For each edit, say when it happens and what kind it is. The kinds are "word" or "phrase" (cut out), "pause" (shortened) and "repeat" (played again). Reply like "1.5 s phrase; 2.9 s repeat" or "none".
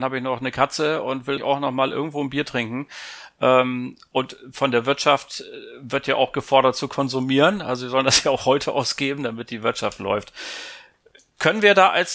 1.4 s word